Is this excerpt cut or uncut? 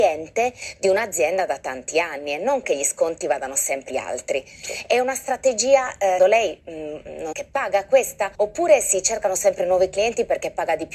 cut